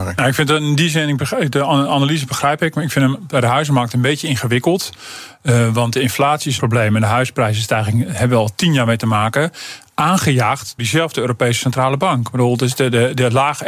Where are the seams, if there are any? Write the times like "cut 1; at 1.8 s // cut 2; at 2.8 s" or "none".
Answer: cut 1; at 6.6 s // cut 2; at 10.8 s